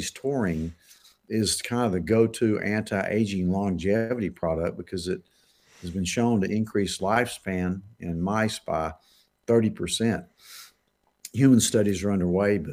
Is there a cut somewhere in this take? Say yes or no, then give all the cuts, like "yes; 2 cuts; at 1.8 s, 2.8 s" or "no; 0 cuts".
no; 0 cuts